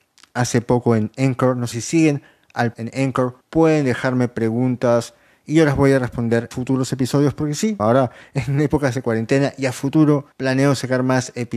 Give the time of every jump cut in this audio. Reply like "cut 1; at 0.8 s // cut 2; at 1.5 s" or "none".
cut 1; at 1.7 s // cut 2; at 2.7 s // cut 3; at 3.4 s // cut 4; at 6.5 s // cut 5; at 7.8 s // cut 6; at 10.3 s